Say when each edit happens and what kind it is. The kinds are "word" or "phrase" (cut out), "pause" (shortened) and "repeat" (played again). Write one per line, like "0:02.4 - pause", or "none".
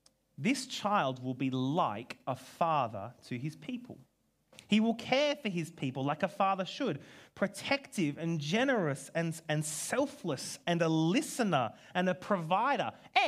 none